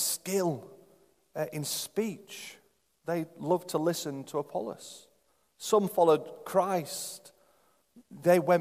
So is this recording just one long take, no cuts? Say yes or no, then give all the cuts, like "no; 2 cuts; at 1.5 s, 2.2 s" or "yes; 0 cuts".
no; 2 cuts; at 2.8 s, 5.3 s